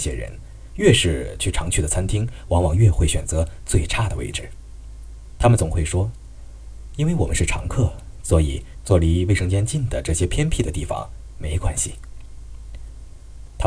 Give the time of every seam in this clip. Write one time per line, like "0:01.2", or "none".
0:08.2